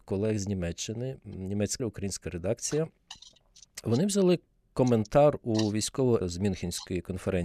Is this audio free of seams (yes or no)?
no